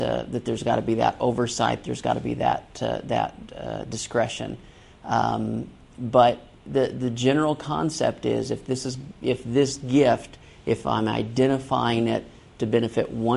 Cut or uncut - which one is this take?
uncut